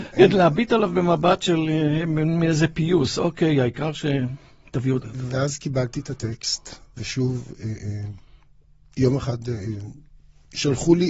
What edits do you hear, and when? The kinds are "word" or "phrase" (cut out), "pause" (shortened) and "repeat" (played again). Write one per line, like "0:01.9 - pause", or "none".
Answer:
0:05.0 - phrase